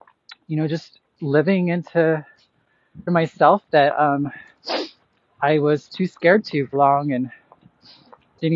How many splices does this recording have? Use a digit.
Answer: 2